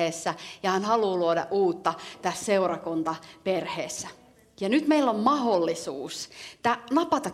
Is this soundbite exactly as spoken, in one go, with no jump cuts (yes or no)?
yes